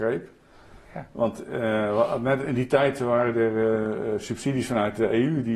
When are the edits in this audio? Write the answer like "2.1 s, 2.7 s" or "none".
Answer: none